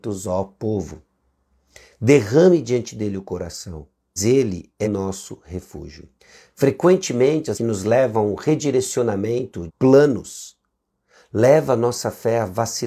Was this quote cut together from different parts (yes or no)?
yes